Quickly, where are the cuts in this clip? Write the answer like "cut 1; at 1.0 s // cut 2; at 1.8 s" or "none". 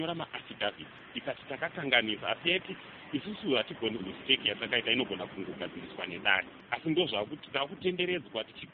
cut 1; at 4.0 s